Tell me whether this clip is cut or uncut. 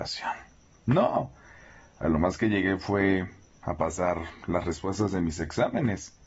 uncut